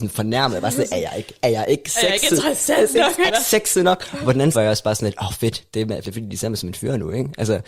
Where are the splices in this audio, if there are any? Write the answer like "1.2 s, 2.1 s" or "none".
3.3 s, 4.5 s, 6.0 s